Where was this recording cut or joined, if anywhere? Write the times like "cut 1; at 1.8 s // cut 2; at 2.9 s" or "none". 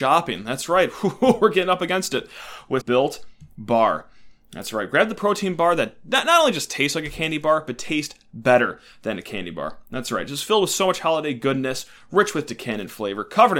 cut 1; at 2.8 s